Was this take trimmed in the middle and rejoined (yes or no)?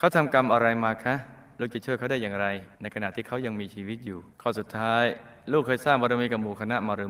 yes